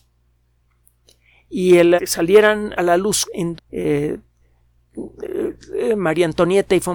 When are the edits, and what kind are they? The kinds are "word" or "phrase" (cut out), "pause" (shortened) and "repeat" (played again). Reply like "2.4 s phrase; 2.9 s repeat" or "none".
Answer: 2.0 s word; 2.8 s word; 3.3 s word; 3.6 s word